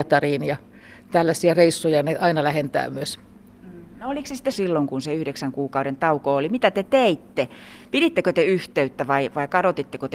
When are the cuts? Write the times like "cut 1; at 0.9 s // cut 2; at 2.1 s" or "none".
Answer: cut 1; at 4.5 s